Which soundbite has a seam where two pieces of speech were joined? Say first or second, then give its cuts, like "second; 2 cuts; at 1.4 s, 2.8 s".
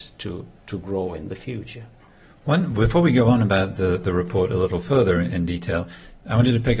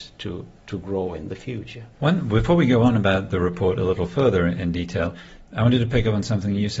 second; 2 cuts; at 1.9 s, 3.3 s